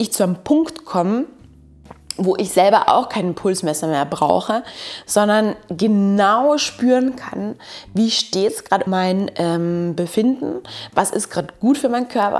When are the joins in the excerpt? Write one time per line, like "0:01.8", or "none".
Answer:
0:08.9